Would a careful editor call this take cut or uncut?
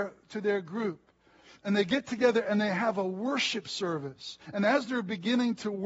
cut